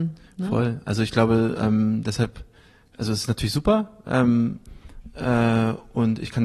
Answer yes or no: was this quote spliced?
no